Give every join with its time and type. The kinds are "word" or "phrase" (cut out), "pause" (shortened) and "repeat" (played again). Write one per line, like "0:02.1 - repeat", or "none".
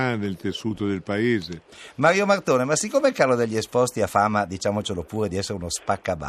none